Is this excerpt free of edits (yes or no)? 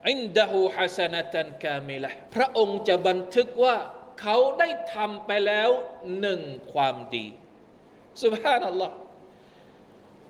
no